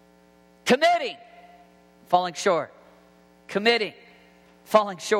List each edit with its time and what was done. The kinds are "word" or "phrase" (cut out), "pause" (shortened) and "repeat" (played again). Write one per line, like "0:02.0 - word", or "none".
none